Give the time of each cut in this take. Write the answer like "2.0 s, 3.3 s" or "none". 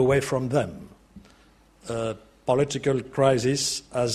none

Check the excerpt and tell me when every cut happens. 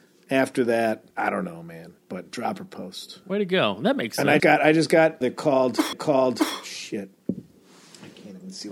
1.1 s, 2.0 s, 3.2 s, 4.4 s, 5.2 s, 5.9 s

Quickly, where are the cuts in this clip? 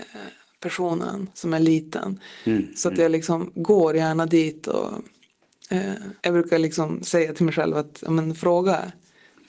1.3 s, 6.2 s

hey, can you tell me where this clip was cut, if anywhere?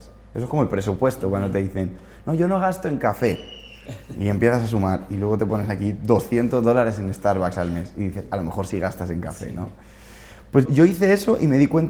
10.7 s

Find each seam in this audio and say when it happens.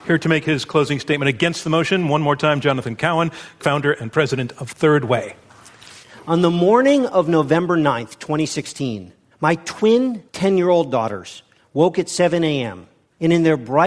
none

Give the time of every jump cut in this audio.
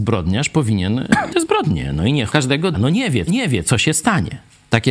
1.3 s, 2.3 s, 2.7 s, 3.3 s

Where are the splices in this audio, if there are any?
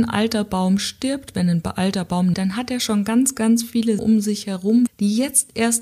2.3 s, 4.0 s, 4.9 s

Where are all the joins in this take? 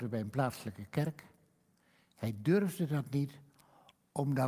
none

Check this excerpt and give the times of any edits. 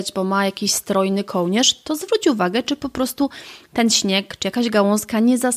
none

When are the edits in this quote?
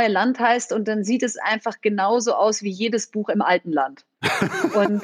none

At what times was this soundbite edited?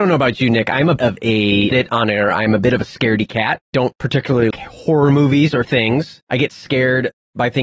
1.0 s, 1.7 s, 3.6 s, 4.5 s, 5.6 s, 6.2 s

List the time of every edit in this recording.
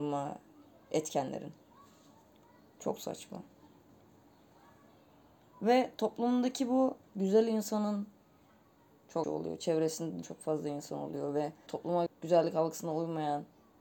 7.1 s, 9.2 s, 10.2 s, 11.7 s, 12.1 s

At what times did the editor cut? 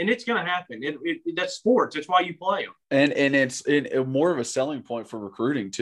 2.8 s

